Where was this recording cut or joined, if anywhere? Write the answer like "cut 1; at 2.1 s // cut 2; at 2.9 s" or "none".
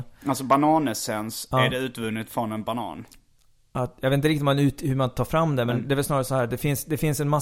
none